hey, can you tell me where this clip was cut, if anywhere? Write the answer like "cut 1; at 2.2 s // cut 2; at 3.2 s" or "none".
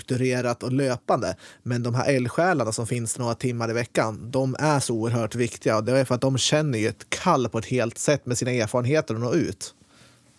none